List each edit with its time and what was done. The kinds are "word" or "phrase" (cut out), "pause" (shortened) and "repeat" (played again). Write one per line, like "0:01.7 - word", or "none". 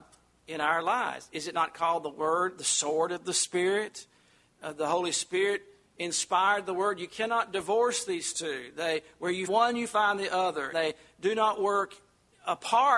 0:09.5 - word
0:10.7 - word